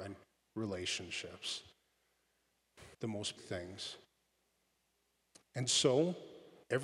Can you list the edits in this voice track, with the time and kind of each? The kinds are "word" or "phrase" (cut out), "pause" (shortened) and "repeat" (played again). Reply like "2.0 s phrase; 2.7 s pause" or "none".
2.9 s pause; 3.4 s word

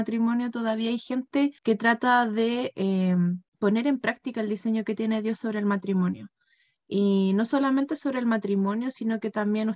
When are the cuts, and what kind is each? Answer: 1.6 s pause; 3.5 s pause

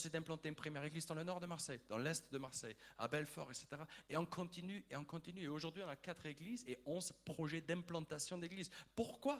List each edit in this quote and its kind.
none

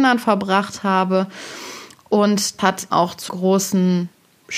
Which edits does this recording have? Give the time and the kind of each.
2.6 s word; 2.9 s word; 3.3 s word

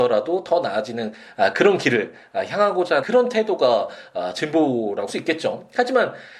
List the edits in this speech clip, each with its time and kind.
3.0 s word; 5.1 s word

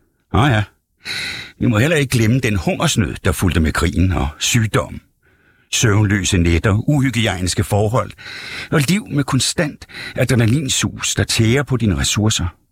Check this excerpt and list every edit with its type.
none

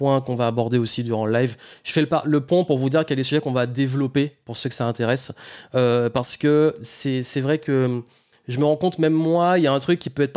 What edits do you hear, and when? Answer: none

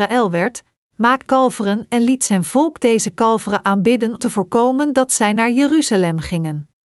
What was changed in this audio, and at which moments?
1.3 s phrase; 4.2 s word

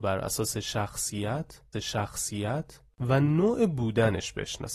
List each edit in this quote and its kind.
1.7 s repeat

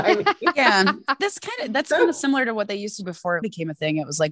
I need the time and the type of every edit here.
1.2 s word; 3.0 s word; 3.4 s word

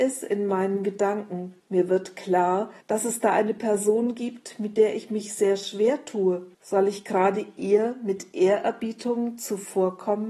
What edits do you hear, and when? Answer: 1.6 s pause; 2.8 s pause; 6.5 s pause

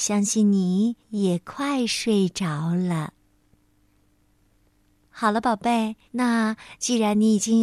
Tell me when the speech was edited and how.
1.0 s pause; 6.1 s pause

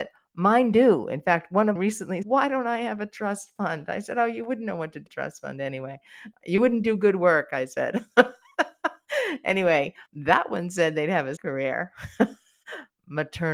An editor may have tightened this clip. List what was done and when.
1.8 s word; 2.2 s word; 5.1 s phrase; 10.1 s pause; 11.4 s word

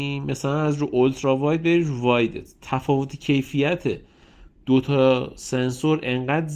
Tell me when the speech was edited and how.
none

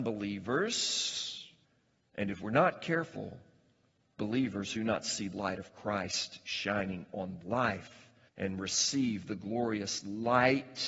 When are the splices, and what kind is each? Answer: 1.6 s pause; 4.2 s word; 4.8 s word; 5.3 s word; 7.4 s word; 8.3 s pause

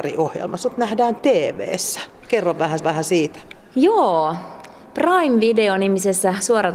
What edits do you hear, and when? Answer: 2.8 s repeat

